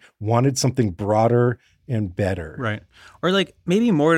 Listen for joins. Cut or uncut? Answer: uncut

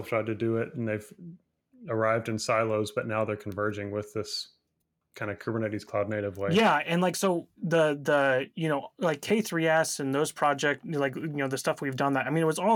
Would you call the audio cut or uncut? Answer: uncut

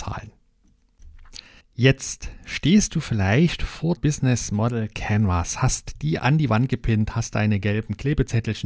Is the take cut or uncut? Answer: cut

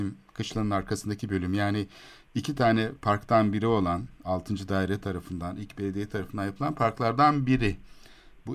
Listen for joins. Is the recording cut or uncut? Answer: uncut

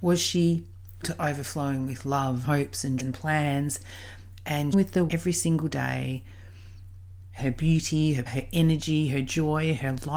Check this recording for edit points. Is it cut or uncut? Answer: cut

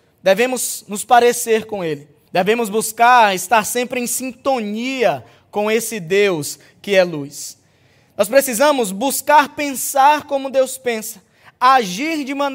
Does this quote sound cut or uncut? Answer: cut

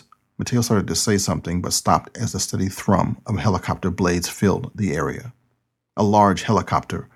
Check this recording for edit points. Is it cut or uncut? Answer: uncut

